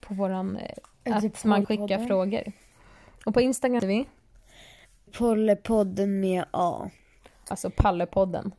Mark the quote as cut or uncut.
cut